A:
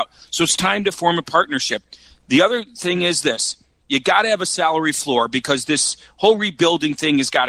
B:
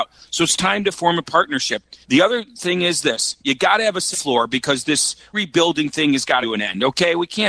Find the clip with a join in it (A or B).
B